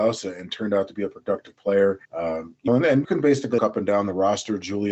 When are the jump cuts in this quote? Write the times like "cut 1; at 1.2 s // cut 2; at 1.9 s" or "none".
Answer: cut 1; at 2.0 s // cut 2; at 2.7 s // cut 3; at 3.0 s // cut 4; at 3.6 s